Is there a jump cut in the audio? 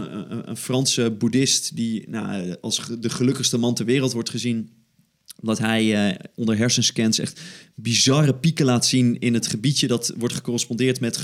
no; 0 cuts

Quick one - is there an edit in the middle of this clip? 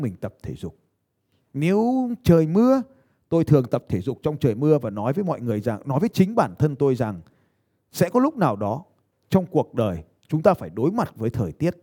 no; 0 cuts

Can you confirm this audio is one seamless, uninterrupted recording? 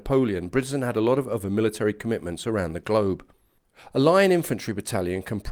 yes; 0 cuts

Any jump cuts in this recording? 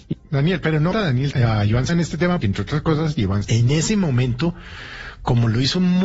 yes; 5 cuts; at 0.9 s, 1.3 s, 1.9 s, 2.4 s, 3.4 s

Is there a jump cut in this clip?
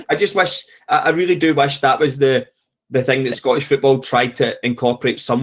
no; 0 cuts

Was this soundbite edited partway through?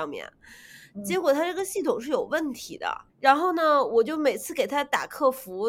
yes; 1 cut; at 3.1 s

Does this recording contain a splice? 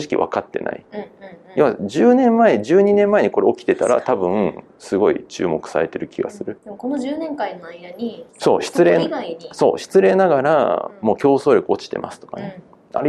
yes; 2 cuts; at 6.6 s, 8.3 s

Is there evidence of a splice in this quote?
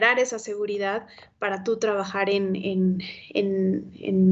no; 0 cuts

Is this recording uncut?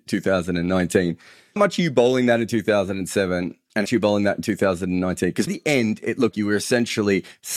no; 4 cuts; at 1.6 s, 3.8 s, 5.5 s, 6.3 s

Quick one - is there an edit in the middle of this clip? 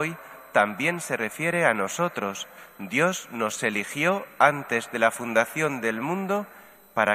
no; 0 cuts

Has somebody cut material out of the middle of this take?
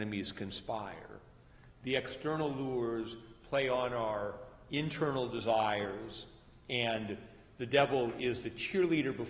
no; 0 cuts

